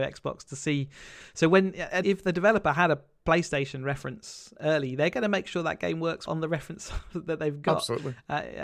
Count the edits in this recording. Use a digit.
3